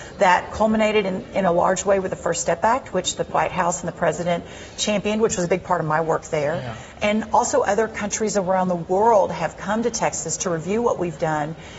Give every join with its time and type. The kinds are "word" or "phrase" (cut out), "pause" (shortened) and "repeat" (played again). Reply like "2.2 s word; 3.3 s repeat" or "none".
none